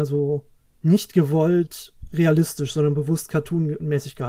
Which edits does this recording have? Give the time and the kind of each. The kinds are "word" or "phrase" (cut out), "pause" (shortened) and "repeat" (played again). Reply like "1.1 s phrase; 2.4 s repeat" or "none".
none